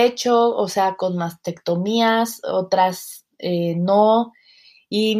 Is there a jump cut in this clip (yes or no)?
no